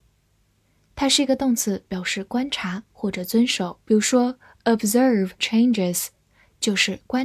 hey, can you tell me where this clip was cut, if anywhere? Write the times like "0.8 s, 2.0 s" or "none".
3.8 s, 5.4 s